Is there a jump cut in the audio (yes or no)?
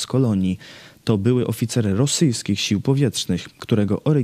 no